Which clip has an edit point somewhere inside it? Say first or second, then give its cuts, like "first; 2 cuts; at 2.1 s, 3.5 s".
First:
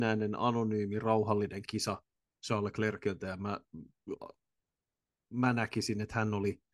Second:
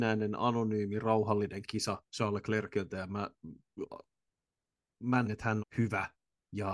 second; 3 cuts; at 2.1 s, 5.2 s, 5.6 s